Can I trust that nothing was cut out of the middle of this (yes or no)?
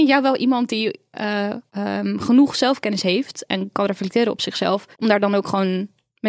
no